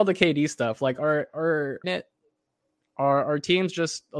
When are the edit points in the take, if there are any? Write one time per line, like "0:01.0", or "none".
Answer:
0:01.8